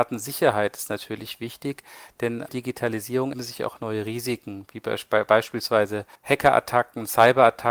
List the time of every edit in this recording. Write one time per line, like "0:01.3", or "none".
0:02.5
0:03.3
0:06.2